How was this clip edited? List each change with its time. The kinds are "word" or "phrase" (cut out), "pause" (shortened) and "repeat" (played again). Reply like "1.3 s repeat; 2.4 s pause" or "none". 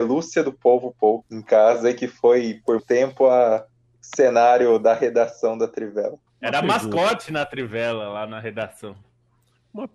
1.2 s phrase; 2.8 s word; 6.3 s pause